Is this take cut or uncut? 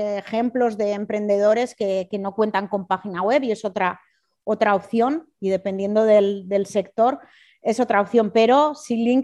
uncut